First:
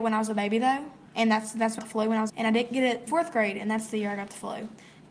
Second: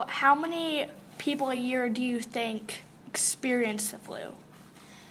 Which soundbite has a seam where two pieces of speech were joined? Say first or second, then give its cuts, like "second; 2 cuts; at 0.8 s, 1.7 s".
first; 4 cuts; at 1.1 s, 1.8 s, 2.3 s, 3.1 s